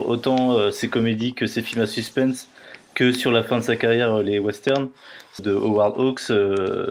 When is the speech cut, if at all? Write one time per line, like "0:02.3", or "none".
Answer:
0:05.4